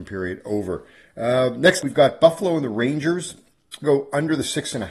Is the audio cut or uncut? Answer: cut